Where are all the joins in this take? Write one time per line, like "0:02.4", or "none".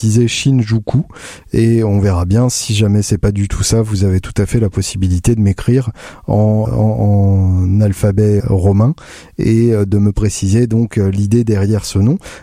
0:06.7
0:08.4